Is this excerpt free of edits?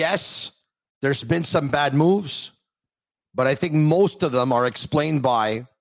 yes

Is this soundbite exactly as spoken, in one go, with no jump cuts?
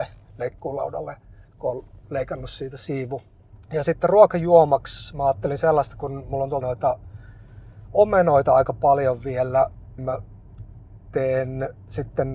no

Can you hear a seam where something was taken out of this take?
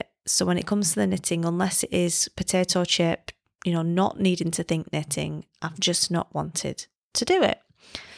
no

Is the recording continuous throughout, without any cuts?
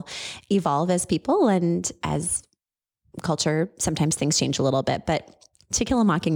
yes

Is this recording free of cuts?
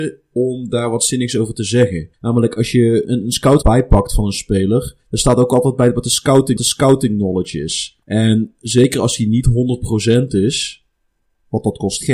no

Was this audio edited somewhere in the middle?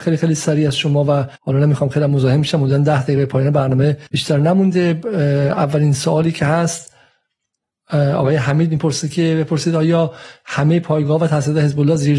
yes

